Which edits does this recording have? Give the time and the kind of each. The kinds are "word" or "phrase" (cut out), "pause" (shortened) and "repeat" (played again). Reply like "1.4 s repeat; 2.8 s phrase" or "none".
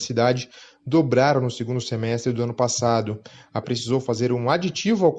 3.6 s word